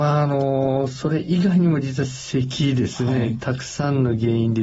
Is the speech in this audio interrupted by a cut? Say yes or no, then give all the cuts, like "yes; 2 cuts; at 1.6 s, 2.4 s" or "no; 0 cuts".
no; 0 cuts